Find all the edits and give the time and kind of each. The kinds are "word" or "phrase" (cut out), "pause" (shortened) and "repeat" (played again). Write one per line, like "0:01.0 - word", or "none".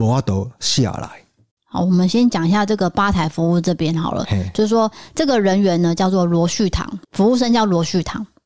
0:07.0 - pause